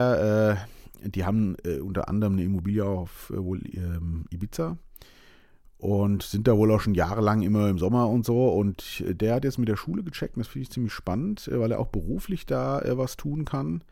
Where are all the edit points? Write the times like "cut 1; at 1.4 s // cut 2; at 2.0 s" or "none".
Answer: none